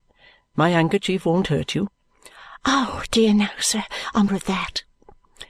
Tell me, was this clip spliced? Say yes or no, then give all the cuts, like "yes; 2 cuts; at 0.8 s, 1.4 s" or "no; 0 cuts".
yes; 1 cut; at 4.3 s